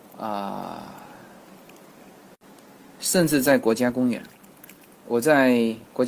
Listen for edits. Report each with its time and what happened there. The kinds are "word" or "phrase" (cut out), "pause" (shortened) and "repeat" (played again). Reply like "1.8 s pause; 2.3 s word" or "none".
4.9 s word